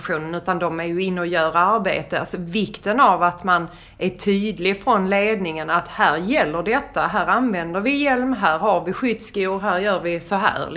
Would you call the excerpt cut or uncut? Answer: uncut